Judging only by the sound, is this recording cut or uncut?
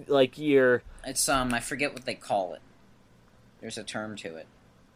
uncut